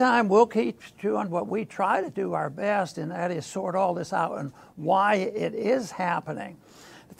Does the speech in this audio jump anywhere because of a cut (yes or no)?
no